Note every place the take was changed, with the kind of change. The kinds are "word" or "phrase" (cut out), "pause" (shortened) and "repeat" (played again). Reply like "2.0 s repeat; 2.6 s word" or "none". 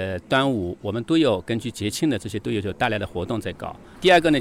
none